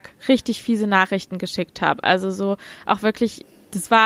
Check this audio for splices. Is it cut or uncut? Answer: uncut